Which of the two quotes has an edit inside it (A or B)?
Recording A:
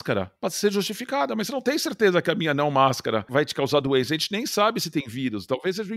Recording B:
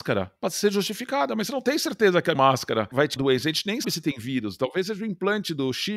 B